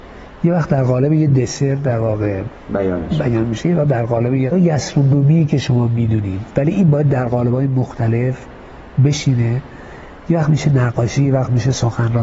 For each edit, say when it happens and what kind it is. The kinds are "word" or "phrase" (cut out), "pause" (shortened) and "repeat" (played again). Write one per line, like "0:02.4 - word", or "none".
0:04.5 - phrase